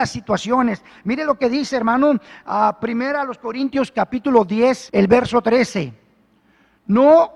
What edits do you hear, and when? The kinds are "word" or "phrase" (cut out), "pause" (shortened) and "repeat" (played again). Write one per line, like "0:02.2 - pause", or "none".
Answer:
0:04.9 - pause